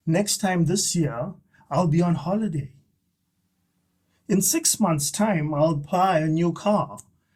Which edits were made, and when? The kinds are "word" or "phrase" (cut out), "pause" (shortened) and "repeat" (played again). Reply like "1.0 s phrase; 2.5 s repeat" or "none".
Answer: none